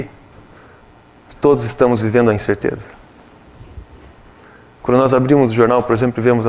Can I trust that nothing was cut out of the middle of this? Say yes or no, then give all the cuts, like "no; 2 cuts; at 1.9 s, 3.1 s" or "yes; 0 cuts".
yes; 0 cuts